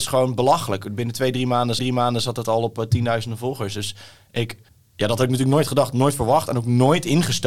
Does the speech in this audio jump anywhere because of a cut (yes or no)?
yes